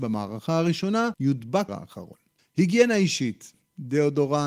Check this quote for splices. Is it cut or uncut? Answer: cut